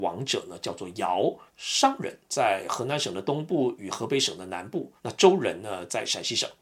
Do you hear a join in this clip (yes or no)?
yes